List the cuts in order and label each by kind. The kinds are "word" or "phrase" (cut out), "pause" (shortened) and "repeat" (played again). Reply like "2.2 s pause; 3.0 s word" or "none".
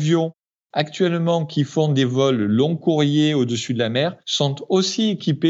4.2 s pause